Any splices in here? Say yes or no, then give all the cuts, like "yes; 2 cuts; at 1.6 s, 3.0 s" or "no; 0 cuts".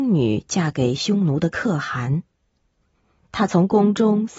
no; 0 cuts